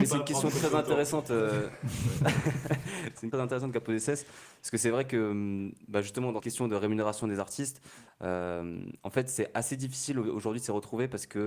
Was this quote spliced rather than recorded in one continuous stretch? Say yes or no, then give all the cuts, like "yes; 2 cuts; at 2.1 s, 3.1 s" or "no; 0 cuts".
yes; 2 cuts; at 3.3 s, 6.4 s